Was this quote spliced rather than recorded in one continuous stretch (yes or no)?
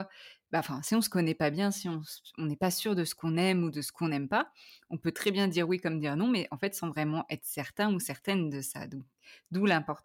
no